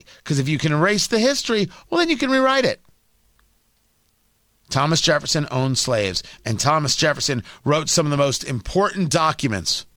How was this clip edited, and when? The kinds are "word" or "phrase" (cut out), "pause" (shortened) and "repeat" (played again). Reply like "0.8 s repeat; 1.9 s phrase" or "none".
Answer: none